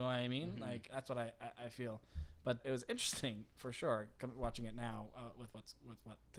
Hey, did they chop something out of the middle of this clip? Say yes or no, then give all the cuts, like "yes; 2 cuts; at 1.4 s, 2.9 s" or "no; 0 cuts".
yes; 1 cut; at 2.6 s